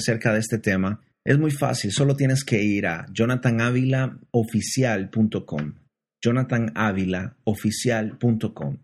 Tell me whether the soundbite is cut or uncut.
uncut